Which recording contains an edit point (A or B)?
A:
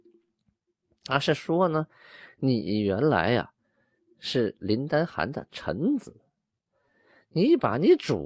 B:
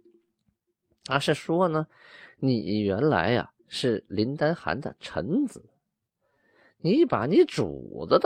B